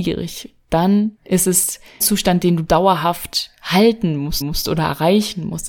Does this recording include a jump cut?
yes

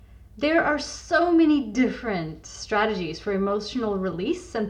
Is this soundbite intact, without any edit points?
yes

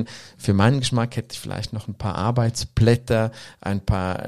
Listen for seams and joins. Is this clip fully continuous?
yes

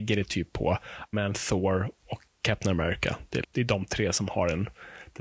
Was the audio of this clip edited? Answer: yes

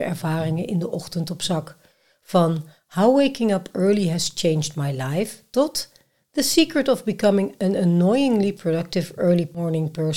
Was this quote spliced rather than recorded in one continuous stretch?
no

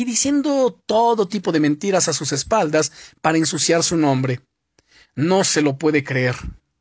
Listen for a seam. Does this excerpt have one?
no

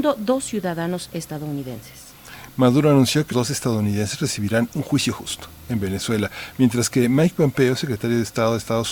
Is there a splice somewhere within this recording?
yes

